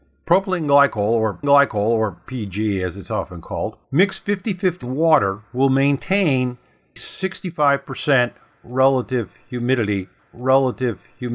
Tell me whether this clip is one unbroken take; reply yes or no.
no